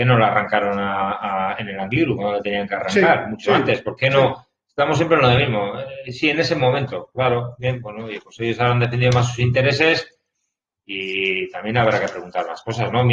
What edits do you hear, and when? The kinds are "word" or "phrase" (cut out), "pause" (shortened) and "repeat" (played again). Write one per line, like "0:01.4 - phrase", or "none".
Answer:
none